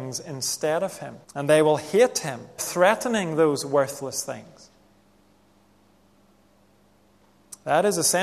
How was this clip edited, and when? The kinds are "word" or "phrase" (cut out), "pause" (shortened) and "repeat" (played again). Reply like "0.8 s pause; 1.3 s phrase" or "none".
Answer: 1.2 s pause; 2.6 s word